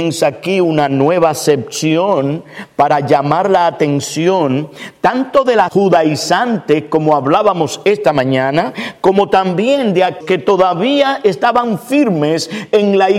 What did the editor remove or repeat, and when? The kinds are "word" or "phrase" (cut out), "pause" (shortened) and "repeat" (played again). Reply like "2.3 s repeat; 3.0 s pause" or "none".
5.7 s word; 10.2 s word